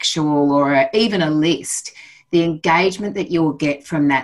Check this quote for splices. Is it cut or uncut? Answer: uncut